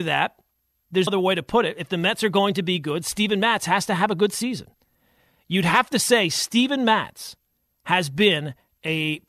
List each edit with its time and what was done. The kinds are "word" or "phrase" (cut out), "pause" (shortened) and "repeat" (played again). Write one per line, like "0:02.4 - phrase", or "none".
0:01.1 - word